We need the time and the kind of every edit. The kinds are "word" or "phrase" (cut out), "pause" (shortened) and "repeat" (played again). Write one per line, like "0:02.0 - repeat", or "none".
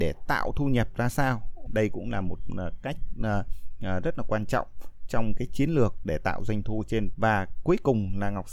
0:01.7 - word
0:07.1 - word